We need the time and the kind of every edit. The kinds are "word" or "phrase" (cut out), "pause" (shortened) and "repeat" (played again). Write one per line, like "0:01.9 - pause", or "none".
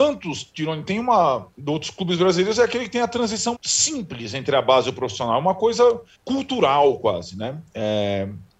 0:01.5 - pause
0:03.5 - word
0:06.1 - pause